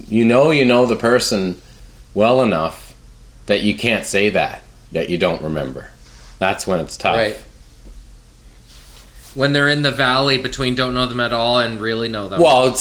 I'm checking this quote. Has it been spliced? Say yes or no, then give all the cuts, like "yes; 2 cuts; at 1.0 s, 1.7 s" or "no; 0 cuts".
no; 0 cuts